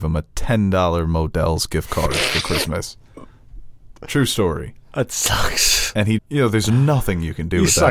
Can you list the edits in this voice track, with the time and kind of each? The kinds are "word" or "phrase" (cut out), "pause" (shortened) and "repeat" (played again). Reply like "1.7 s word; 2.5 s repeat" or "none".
6.2 s word